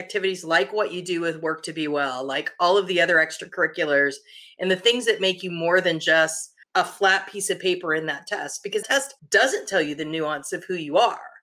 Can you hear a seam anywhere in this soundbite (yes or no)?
yes